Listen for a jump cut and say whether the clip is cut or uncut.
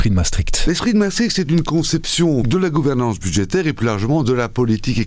uncut